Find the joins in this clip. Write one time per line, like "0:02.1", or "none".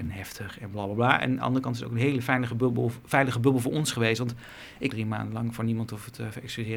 0:04.9

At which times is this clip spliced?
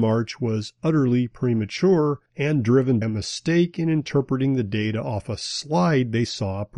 0:02.3
0:03.0

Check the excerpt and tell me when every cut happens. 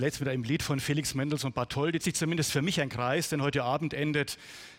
0:02.0

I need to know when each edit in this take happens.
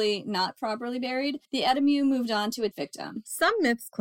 0:01.4
0:02.7

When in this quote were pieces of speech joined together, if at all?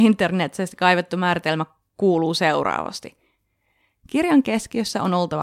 none

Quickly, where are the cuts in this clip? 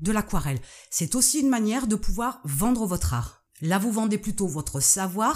none

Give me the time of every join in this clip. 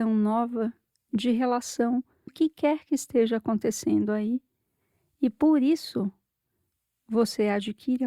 0:02.3

